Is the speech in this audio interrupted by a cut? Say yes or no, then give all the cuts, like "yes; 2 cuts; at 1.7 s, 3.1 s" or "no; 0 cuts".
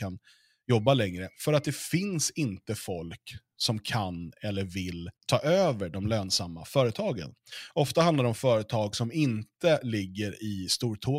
yes; 2 cuts; at 1.3 s, 5.2 s